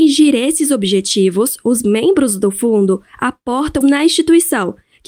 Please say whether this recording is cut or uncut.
cut